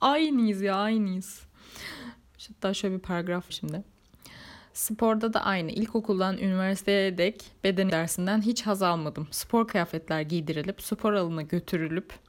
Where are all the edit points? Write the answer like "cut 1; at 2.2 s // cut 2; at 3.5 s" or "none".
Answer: cut 1; at 3.5 s // cut 2; at 7.9 s